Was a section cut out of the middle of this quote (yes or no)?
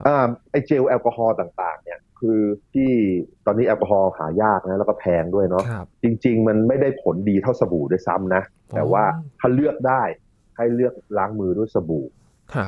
no